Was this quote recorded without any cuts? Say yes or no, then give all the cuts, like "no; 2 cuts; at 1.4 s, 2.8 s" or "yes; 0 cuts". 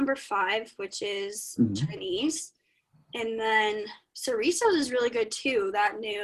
yes; 0 cuts